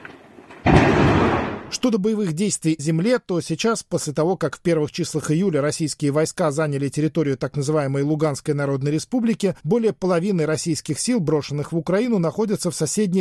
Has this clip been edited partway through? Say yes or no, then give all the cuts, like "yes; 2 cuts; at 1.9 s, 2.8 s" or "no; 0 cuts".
yes; 2 cuts; at 2.8 s, 9.6 s